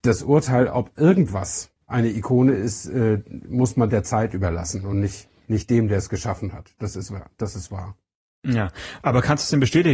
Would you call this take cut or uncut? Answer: uncut